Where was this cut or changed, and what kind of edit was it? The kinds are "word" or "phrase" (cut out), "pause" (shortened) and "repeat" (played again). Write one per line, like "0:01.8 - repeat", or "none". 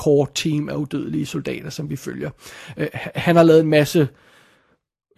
none

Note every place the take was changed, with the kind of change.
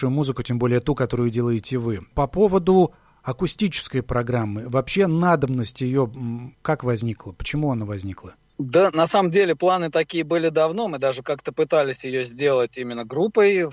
0:06.5 - pause

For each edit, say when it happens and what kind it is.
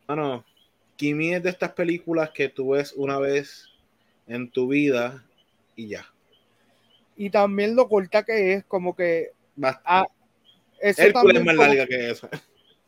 none

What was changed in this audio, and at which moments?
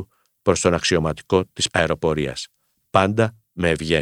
0:01.7 - word

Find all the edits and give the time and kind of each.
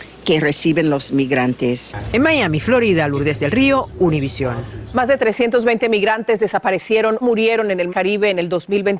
0:07.2 - word
0:07.9 - word

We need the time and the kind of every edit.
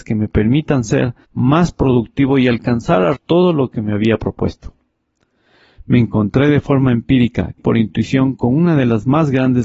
0:01.2 - pause
0:03.1 - word
0:07.6 - word

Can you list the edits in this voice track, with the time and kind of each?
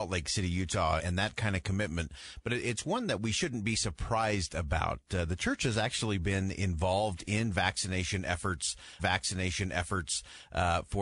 0:01.0 - word
0:09.0 - repeat

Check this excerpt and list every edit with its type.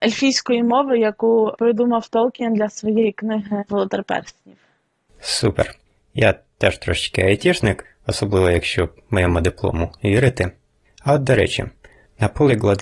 none

